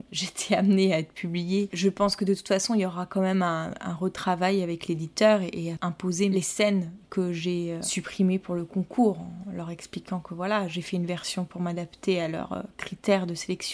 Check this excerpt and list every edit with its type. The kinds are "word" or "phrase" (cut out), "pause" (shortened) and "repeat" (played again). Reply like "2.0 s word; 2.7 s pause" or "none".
5.8 s phrase

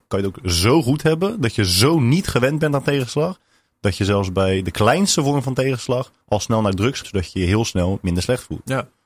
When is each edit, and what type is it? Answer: 6.2 s pause; 7.0 s word

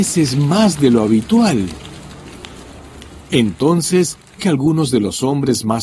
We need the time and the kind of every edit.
4.4 s word

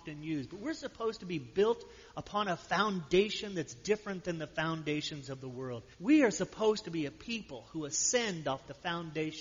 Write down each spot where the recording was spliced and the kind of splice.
5.9 s pause

